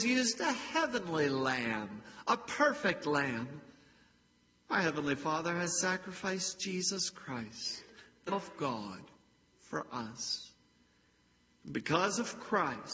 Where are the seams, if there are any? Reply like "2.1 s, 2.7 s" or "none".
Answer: 8.3 s